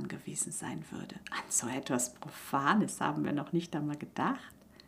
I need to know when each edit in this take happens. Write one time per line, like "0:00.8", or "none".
0:01.2